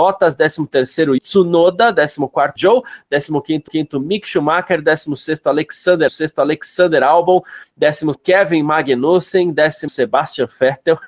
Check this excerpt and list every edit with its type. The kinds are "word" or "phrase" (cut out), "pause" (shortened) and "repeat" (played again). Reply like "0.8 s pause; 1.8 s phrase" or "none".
1.2 s word; 2.6 s word; 3.7 s repeat; 6.1 s repeat; 8.1 s word; 9.9 s word